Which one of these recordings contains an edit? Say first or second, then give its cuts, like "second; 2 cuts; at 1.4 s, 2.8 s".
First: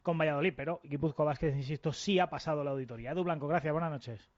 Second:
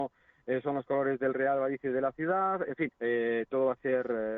second; 1 cut; at 2.9 s